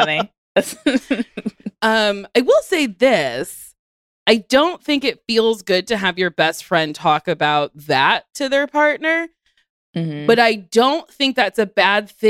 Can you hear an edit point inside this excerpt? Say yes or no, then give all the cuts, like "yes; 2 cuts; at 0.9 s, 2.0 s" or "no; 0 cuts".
no; 0 cuts